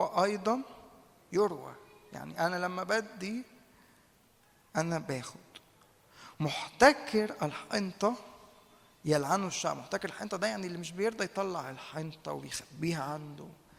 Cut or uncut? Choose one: uncut